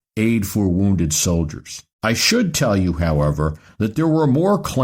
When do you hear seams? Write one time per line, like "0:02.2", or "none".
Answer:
0:01.9